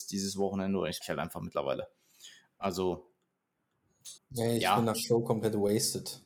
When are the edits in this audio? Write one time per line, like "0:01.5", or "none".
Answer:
0:01.0
0:04.2
0:04.9